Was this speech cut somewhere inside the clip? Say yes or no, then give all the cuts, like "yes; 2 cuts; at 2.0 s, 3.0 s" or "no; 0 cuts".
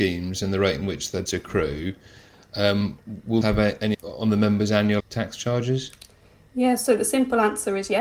yes; 4 cuts; at 1.3 s, 3.4 s, 3.9 s, 5.0 s